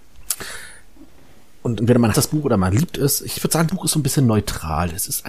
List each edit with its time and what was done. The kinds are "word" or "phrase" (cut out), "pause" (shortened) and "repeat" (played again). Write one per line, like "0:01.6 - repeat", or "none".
0:01.8 - word
0:02.1 - word
0:03.7 - word